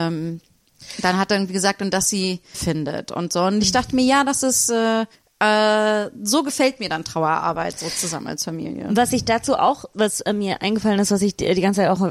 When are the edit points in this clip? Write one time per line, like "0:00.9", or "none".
0:02.5
0:05.2
0:09.9